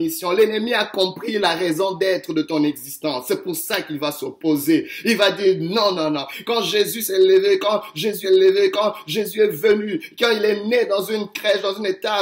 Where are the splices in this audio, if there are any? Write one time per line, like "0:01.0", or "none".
0:05.9
0:08.2